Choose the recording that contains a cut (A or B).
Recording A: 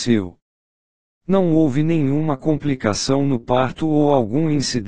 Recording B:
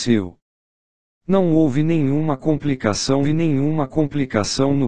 B